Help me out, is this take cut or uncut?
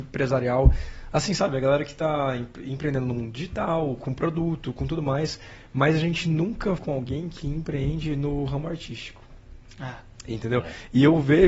cut